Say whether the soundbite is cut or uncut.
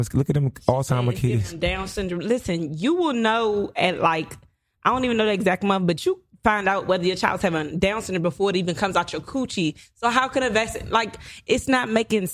uncut